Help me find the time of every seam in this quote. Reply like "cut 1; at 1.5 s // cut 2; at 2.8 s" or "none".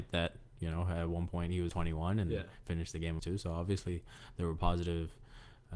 cut 1; at 1.7 s // cut 2; at 3.2 s